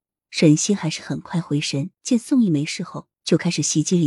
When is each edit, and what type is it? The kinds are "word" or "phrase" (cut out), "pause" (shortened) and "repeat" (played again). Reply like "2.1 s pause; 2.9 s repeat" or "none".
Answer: 1.9 s pause